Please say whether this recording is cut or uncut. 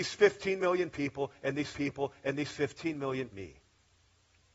cut